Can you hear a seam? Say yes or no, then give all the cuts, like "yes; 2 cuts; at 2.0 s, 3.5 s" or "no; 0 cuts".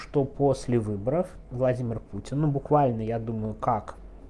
no; 0 cuts